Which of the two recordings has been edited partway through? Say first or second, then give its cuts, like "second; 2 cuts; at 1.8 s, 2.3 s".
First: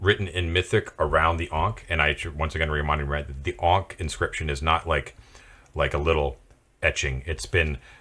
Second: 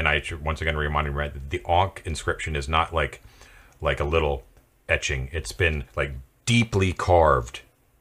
second; 1 cut; at 5.9 s